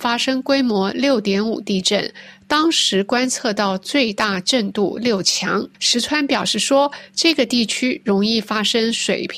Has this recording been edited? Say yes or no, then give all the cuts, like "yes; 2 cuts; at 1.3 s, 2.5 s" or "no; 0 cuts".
yes; 1 cut; at 5.7 s